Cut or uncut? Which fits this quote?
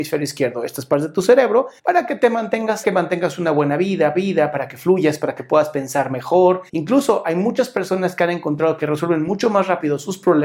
cut